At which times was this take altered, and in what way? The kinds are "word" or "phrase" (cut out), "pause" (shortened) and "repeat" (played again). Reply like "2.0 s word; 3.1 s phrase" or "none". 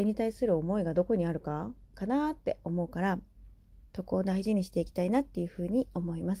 3.9 s pause